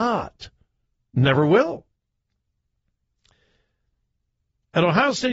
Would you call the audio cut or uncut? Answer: uncut